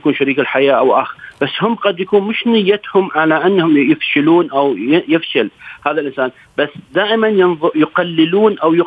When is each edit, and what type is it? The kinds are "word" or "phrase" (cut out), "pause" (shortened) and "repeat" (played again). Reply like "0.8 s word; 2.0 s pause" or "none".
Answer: none